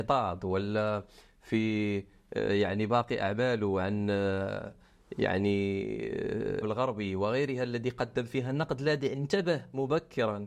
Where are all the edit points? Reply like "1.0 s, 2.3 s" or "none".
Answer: 6.6 s